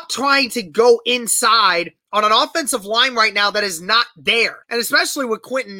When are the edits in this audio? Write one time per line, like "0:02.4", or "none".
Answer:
0:04.6